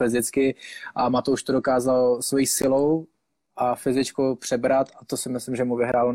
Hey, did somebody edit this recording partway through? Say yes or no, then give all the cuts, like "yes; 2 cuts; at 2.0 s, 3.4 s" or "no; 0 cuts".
no; 0 cuts